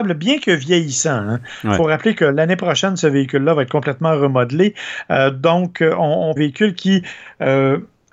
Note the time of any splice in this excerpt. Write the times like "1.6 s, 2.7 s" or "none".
6.4 s